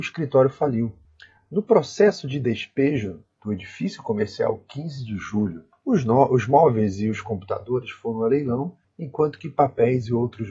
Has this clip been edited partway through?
no; 0 cuts

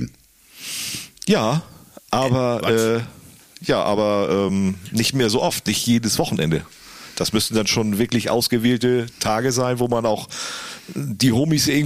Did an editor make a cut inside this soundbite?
no; 0 cuts

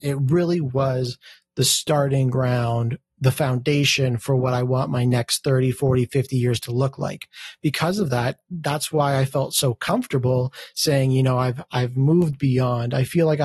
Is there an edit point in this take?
no; 0 cuts

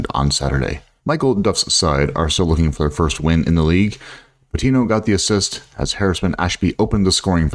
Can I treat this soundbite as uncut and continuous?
yes; 0 cuts

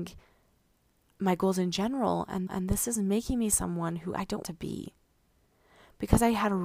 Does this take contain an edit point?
yes; 2 cuts; at 2.5 s, 4.4 s

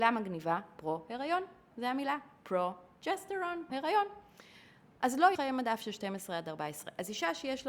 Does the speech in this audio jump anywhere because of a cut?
yes; 3 cuts; at 1.7 s, 3.7 s, 5.3 s

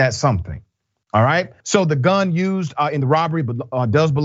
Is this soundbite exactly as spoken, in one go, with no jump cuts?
no; 1 cut; at 1.6 s

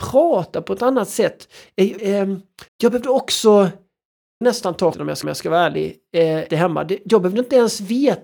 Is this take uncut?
no; 6 cuts; at 2.0 s, 2.7 s, 4.4 s, 4.9 s, 5.2 s, 6.5 s

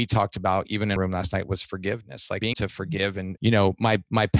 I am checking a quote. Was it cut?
yes; 3 cuts; at 1.0 s, 2.5 s, 3.4 s

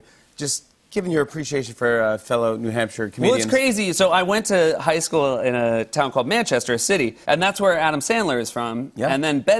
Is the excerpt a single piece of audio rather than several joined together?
no; 1 cut; at 7.2 s

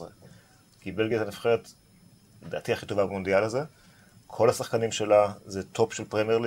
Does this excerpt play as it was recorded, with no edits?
yes; 0 cuts

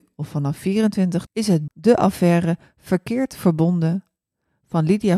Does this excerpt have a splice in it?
yes; 2 cuts; at 1.3 s, 1.7 s

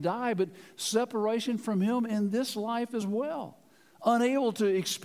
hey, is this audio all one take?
yes; 0 cuts

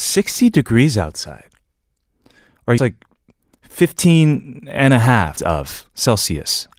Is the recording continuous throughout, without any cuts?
no; 2 cuts; at 2.8 s, 5.4 s

